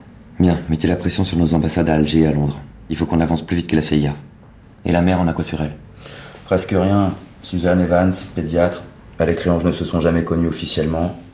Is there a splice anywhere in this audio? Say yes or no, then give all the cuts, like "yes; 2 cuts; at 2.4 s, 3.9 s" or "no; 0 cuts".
no; 0 cuts